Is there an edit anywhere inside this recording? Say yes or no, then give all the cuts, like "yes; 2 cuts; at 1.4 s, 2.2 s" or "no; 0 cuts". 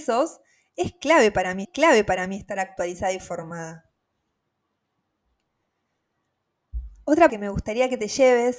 yes; 2 cuts; at 1.6 s, 7.3 s